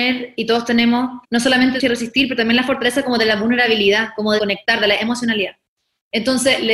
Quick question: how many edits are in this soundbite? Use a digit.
3